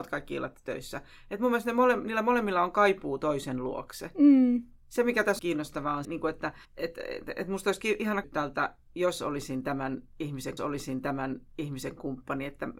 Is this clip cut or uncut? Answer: cut